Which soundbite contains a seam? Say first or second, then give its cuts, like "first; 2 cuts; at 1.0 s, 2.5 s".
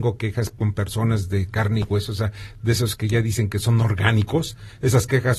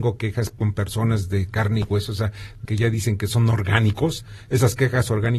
second; 1 cut; at 2.6 s